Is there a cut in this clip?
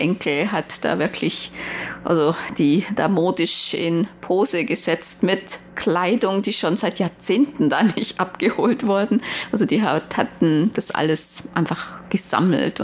no; 0 cuts

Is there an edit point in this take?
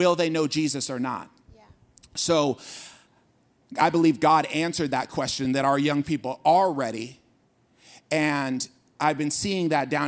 no; 0 cuts

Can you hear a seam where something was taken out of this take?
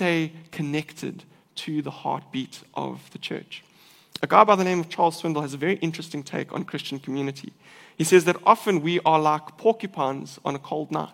no; 0 cuts

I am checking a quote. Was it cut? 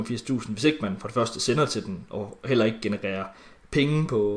no; 0 cuts

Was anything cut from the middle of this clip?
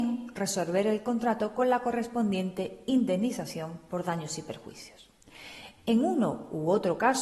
no; 0 cuts

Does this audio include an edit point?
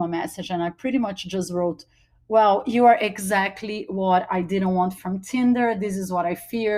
no; 0 cuts

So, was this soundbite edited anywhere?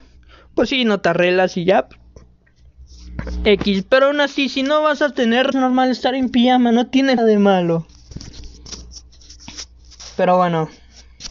yes; 2 cuts; at 5.5 s, 7.2 s

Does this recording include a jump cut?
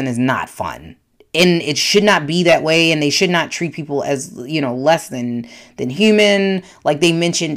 no; 0 cuts

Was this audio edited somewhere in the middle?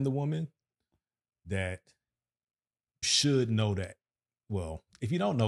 yes; 1 cut; at 3.0 s

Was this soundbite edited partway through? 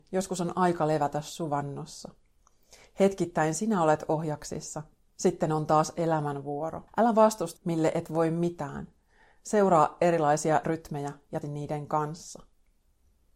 yes; 4 cuts; at 6.9 s, 7.6 s, 10.6 s, 11.4 s

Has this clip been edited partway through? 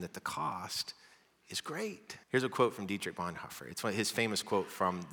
yes; 1 cut; at 2.2 s

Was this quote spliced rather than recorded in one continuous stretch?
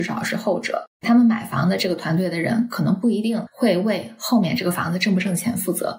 yes; 1 cut; at 0.9 s

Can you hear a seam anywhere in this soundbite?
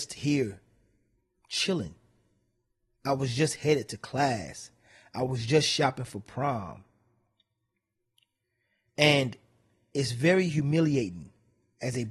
no; 0 cuts

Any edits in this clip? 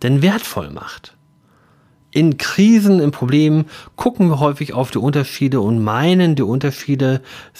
no; 0 cuts

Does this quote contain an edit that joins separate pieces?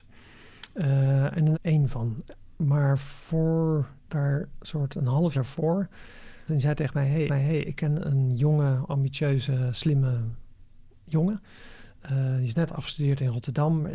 yes; 5 cuts; at 1.5 s, 4.0 s, 5.3 s, 6.5 s, 7.3 s

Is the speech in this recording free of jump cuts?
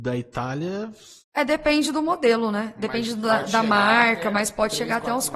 no; 1 cut; at 1.2 s

